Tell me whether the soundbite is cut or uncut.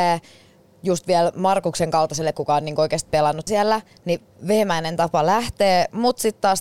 cut